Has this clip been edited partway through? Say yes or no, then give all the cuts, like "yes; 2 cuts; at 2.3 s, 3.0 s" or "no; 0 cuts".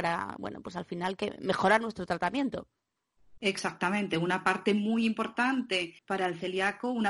yes; 1 cut; at 6.0 s